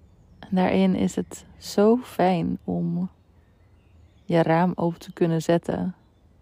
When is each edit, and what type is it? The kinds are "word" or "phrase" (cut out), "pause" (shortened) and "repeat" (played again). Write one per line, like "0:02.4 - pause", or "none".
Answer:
none